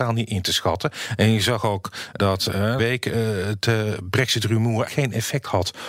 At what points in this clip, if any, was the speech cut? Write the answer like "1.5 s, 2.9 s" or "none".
2.2 s, 2.8 s, 4.9 s